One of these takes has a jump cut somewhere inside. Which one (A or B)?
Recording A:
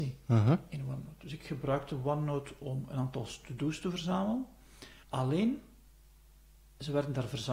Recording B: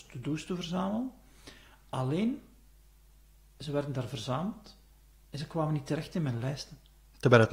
A